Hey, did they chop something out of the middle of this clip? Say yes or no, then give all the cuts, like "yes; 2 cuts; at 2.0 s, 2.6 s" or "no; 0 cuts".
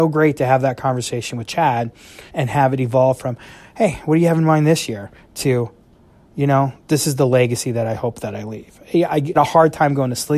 yes; 3 cuts; at 2.3 s, 6.8 s, 9.3 s